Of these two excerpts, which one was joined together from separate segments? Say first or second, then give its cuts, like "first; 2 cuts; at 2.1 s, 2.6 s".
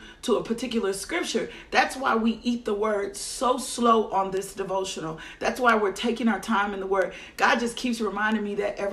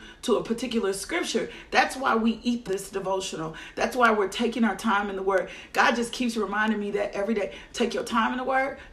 second; 1 cut; at 2.7 s